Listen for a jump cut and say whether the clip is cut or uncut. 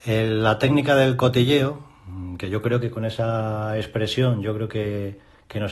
uncut